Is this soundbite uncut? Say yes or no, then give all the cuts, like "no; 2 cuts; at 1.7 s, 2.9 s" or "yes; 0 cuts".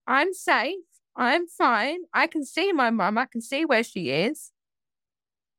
yes; 0 cuts